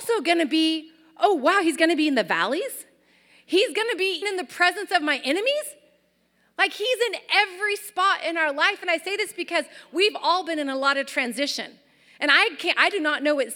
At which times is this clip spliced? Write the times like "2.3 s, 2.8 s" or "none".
4.2 s